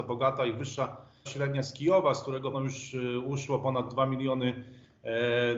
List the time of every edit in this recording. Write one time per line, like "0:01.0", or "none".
0:01.3
0:02.5

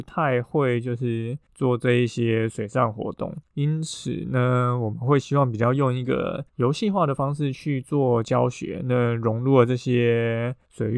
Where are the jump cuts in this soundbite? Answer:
0:06.5

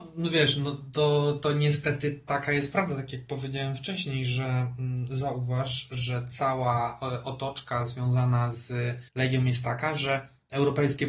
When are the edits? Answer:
0:09.1

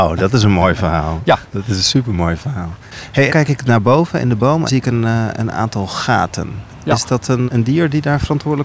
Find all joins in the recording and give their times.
0:01.5
0:02.8
0:03.3
0:04.7
0:07.5

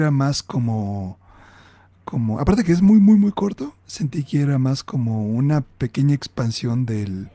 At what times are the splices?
none

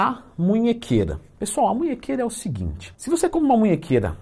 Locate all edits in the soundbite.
none

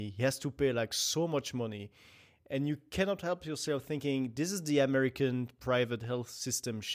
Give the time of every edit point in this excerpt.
none

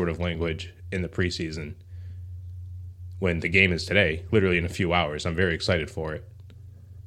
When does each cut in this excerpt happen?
0:04.3

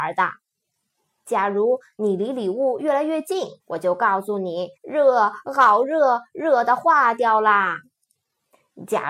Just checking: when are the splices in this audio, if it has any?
0:03.6
0:04.8

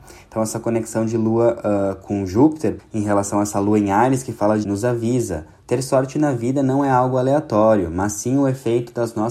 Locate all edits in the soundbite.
0:02.8
0:04.6

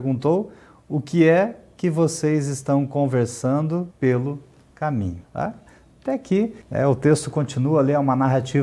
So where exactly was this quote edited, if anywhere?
0:03.9
0:05.2
0:06.6

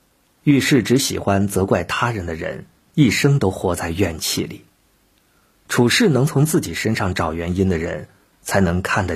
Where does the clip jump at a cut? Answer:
none

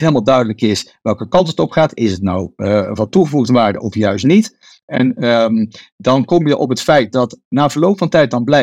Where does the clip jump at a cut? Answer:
none

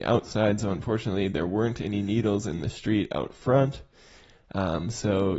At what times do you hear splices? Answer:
none

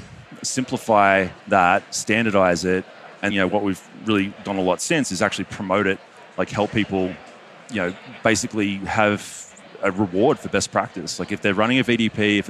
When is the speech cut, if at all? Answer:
0:01.4
0:03.3
0:04.4

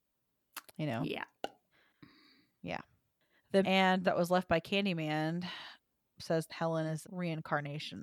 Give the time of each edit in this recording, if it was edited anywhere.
0:03.6
0:04.0
0:06.1
0:06.5
0:07.0

